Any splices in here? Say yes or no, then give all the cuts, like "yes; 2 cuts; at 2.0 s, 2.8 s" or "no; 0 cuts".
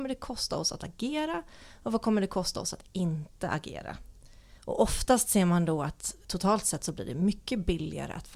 yes; 2 cuts; at 4.6 s, 6.2 s